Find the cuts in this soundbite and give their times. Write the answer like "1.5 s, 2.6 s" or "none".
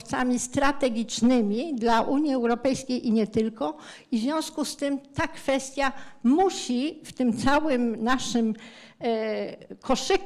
none